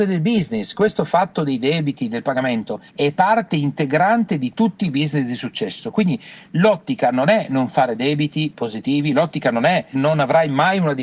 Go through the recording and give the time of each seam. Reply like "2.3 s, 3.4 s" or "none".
2.9 s, 9.9 s